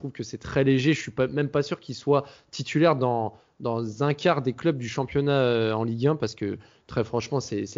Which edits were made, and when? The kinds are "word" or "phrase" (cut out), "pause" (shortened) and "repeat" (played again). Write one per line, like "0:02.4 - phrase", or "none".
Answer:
none